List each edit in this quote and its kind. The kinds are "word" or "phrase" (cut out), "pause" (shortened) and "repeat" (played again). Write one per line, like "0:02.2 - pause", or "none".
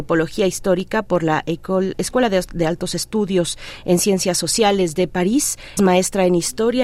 0:01.9 - word
0:05.8 - word

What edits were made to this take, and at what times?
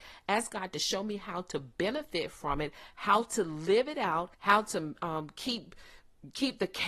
0:04.3 - pause

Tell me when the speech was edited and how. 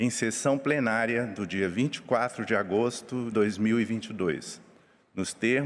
0:03.3 - word

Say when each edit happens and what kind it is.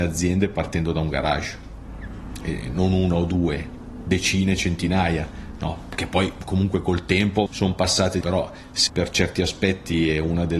0:07.5 - word
0:08.2 - word
0:08.9 - phrase

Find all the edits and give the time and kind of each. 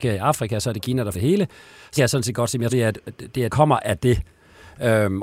0:01.1 - word
0:02.0 - word
0:02.7 - word
0:03.5 - word

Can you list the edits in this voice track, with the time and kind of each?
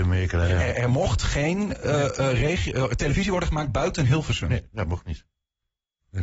none

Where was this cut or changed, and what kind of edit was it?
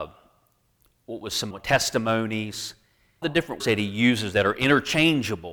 0:01.5 - word
0:03.2 - word
0:03.6 - word

